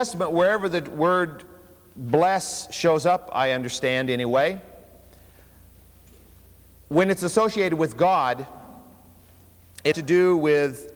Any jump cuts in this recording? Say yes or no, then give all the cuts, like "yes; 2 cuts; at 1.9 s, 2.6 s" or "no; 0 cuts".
yes; 1 cut; at 9.9 s